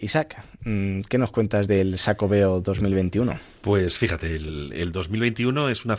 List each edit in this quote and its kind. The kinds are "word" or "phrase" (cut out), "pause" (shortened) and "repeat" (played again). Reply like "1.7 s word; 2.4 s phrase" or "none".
none